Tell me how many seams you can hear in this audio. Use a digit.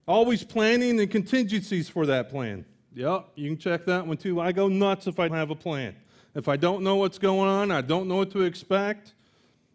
1